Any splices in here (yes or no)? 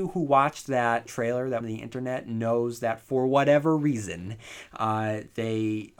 yes